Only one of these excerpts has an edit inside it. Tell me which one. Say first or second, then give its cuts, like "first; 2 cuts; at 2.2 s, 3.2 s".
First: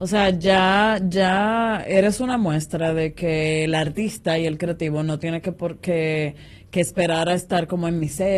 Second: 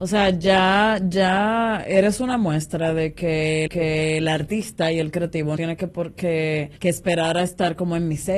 second; 3 cuts; at 3.7 s, 5.6 s, 6.8 s